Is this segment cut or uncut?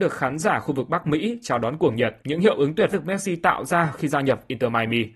cut